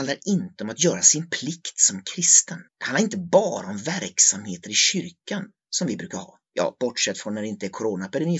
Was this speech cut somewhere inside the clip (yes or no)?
yes